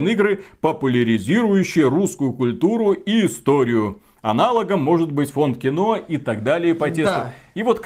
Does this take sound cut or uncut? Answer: uncut